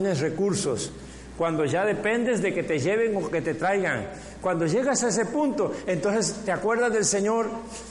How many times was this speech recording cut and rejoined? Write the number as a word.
zero